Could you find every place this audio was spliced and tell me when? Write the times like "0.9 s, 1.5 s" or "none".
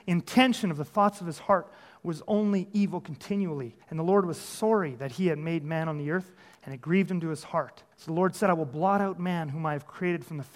3.8 s, 7.9 s